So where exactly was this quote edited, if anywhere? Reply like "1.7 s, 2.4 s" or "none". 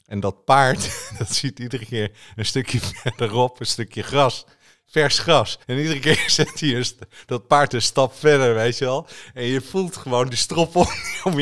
5.6 s